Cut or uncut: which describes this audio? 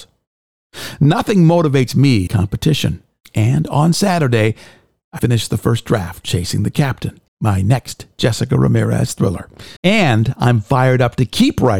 cut